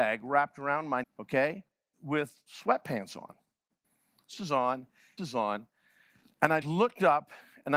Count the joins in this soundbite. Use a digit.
5